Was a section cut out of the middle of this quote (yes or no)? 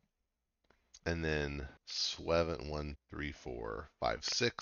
yes